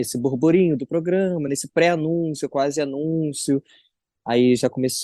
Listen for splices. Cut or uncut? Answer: uncut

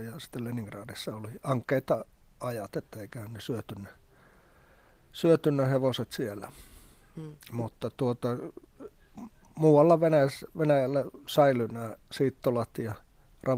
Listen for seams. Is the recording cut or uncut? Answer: uncut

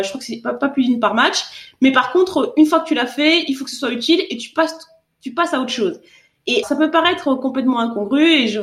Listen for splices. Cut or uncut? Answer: cut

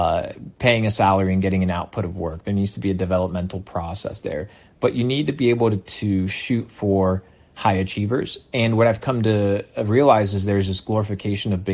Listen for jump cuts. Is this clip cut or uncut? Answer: uncut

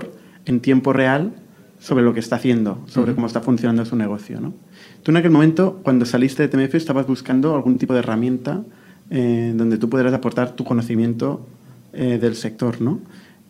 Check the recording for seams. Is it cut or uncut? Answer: uncut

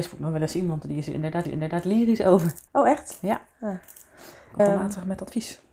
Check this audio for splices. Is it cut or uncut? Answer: cut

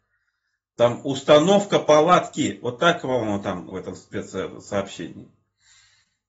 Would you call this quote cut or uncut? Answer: cut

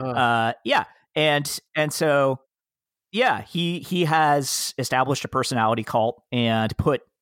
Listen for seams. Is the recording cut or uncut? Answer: uncut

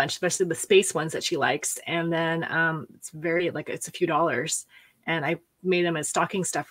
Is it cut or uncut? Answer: uncut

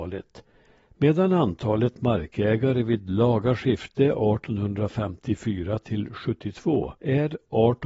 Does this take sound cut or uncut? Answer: cut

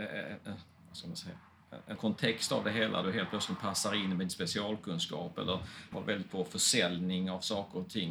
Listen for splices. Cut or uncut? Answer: cut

